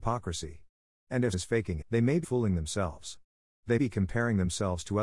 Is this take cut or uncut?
cut